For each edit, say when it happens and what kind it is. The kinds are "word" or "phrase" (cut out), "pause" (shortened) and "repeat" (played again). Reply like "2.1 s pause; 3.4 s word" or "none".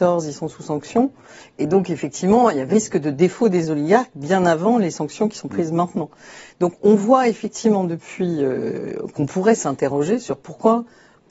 2.7 s word